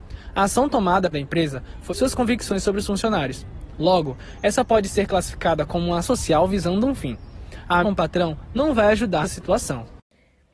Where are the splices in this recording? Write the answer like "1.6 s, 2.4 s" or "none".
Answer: 1.1 s, 1.9 s, 6.0 s, 7.8 s, 9.2 s